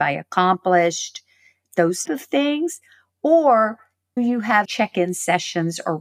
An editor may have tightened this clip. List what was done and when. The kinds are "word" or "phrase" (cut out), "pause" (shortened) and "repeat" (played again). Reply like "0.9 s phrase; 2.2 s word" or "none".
2.0 s word; 4.2 s word; 4.6 s word